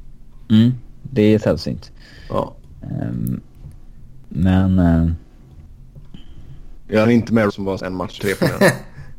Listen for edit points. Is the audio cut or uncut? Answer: cut